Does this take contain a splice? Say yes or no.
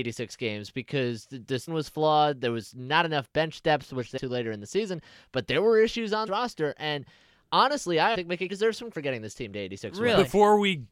yes